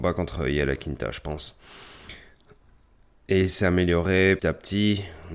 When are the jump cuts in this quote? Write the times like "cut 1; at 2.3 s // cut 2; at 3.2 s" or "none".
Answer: cut 1; at 4.4 s